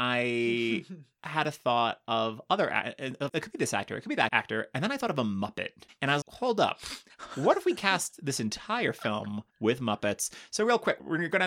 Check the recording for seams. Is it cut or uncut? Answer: cut